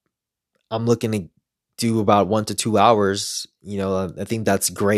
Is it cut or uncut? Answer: uncut